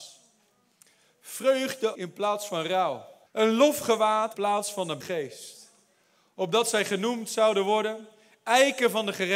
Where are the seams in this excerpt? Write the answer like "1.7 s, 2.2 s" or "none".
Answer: 1.9 s, 3.3 s, 4.3 s, 5.0 s